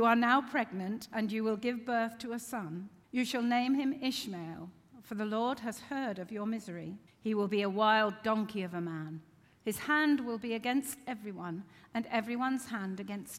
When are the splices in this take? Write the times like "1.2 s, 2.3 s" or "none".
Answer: 3.0 s, 7.1 s